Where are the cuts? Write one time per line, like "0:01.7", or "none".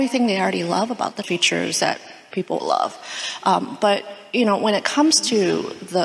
0:01.2
0:02.6